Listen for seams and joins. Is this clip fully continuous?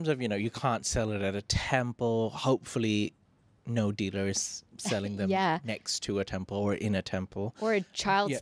no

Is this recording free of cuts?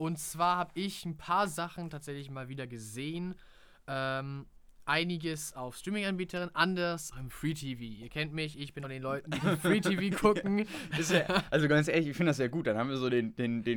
no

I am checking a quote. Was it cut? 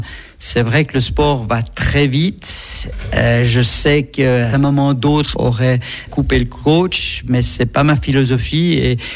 yes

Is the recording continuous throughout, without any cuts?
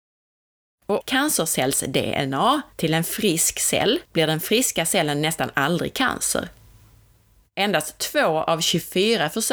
no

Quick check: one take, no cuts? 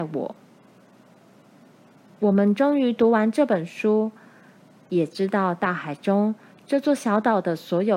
yes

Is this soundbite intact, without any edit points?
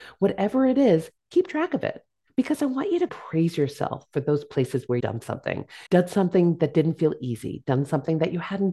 no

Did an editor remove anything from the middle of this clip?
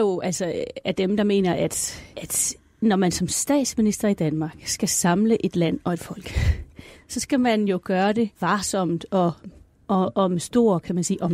yes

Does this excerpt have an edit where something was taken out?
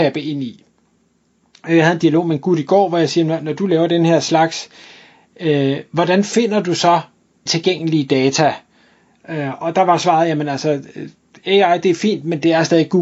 yes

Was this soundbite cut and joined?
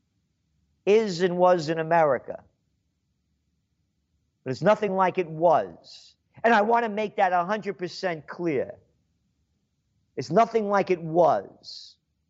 no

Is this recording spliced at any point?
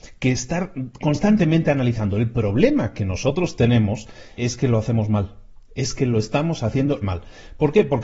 yes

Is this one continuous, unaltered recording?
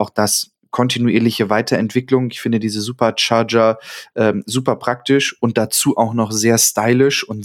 yes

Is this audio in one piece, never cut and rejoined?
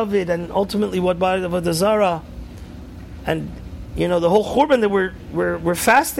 yes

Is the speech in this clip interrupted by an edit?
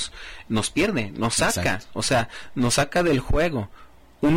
no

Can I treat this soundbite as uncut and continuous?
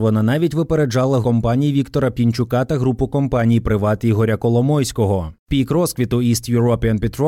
no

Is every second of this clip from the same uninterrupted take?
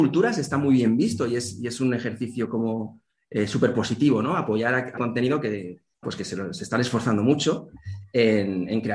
no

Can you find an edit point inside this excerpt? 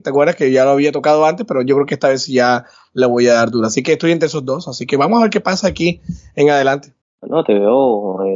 no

